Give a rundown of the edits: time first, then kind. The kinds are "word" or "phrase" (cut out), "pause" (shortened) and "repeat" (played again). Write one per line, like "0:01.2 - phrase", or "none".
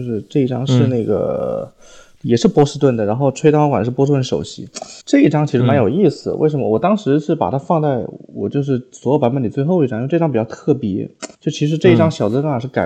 0:05.0 - pause
0:11.3 - pause